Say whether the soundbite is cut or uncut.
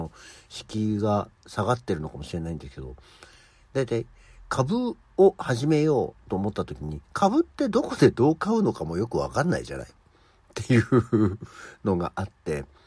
cut